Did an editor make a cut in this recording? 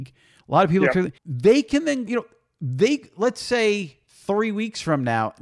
yes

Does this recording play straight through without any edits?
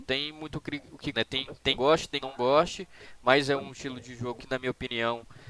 no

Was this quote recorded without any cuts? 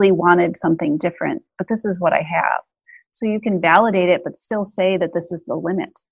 yes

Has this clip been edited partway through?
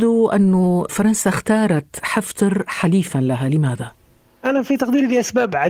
no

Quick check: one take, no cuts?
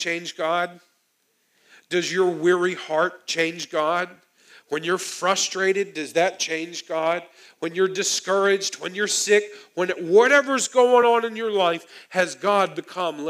yes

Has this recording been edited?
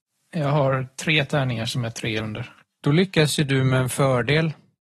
yes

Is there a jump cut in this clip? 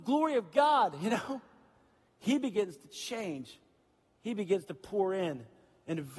no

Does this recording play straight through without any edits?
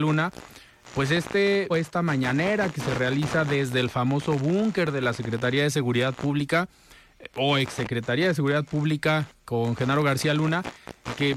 no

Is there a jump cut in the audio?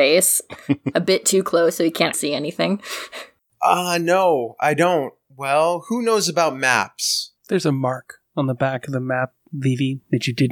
yes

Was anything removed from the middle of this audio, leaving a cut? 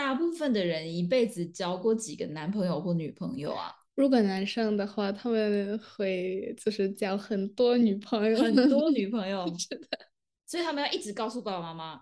no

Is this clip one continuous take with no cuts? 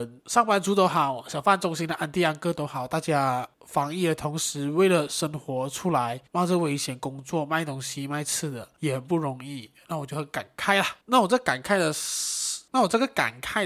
no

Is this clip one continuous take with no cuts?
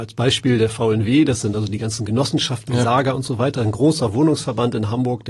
yes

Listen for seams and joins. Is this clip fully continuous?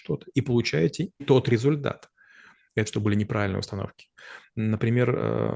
no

